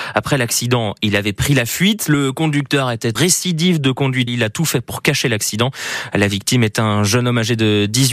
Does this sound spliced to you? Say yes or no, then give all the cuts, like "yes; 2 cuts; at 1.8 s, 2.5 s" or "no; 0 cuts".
yes; 2 cuts; at 3.2 s, 4.3 s